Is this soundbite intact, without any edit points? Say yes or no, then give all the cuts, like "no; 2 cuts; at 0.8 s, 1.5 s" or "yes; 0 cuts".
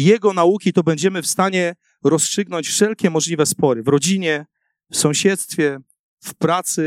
yes; 0 cuts